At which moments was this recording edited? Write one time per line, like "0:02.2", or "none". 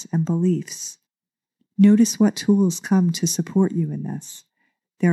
none